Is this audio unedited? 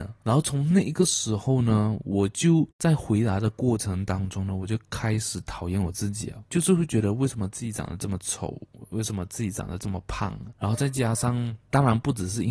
no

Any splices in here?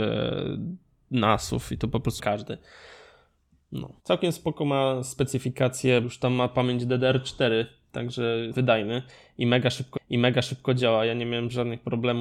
yes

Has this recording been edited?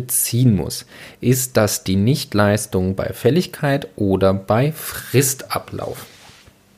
no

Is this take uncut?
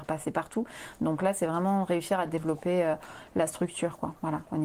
yes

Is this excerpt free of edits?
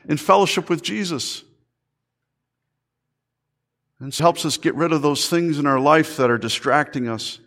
no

